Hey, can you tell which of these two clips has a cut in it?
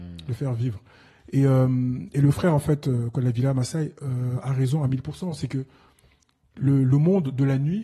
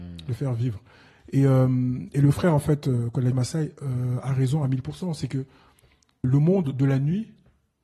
second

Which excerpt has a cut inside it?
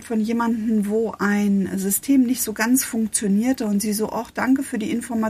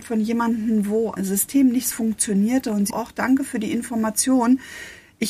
second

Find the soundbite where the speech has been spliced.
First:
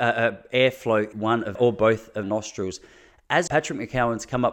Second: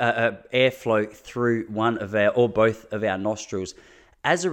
first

